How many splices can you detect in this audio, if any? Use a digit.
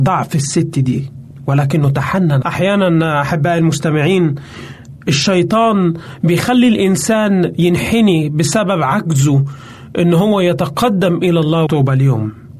2